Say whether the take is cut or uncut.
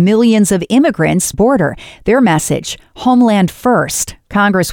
cut